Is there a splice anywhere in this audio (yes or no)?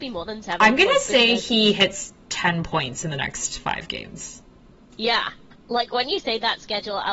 no